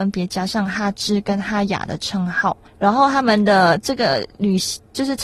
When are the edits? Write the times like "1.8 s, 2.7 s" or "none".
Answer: 2.7 s